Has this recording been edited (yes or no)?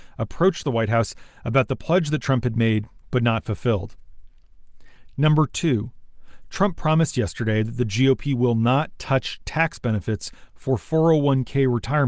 no